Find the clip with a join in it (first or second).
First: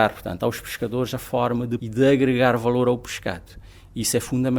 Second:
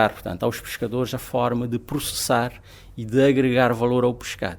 first